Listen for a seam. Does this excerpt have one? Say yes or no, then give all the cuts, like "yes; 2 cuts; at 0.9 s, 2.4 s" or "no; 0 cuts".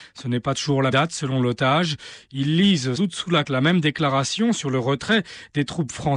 yes; 3 cuts; at 0.9 s, 3.0 s, 3.4 s